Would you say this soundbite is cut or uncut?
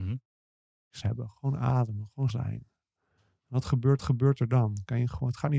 cut